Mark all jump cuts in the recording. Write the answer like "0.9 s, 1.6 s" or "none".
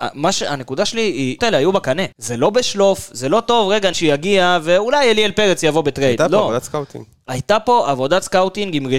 1.4 s, 2.1 s, 3.9 s

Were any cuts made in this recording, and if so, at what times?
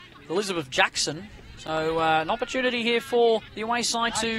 3.5 s

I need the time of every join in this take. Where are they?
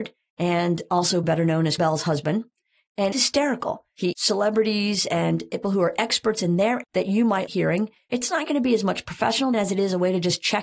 1.2 s, 1.8 s, 3.1 s, 4.1 s, 5.6 s, 6.8 s, 7.5 s, 9.5 s

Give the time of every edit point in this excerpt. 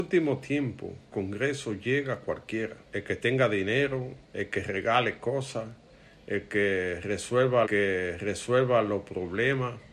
1.1 s, 2.9 s, 4.2 s, 7.7 s

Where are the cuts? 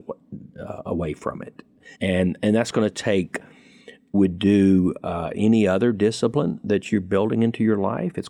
1.9 s, 4.1 s

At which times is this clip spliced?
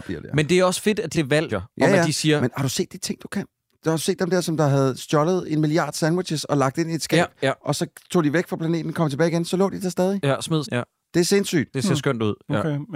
1.1 s, 1.5 s, 10.6 s

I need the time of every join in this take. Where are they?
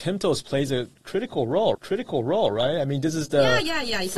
1.7 s

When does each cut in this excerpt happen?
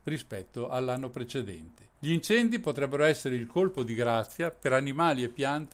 1.9 s

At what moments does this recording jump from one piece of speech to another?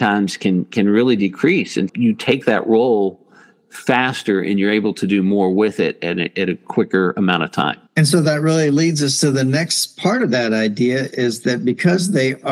1.9 s, 7.9 s

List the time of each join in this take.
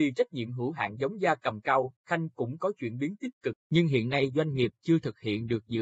3.6 s

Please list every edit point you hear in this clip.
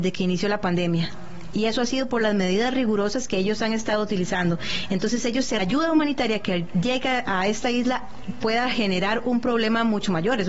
5.6 s

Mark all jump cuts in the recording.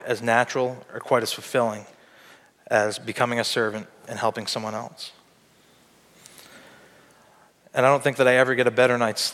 none

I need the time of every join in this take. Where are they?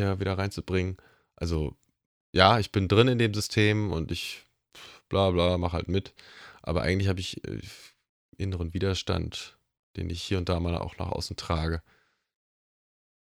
none

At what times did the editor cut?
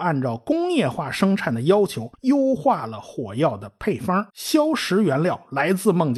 2.1 s, 4.3 s

